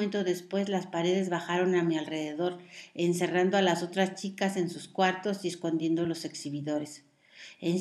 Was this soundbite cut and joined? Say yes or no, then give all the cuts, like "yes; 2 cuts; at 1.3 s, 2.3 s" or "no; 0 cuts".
no; 0 cuts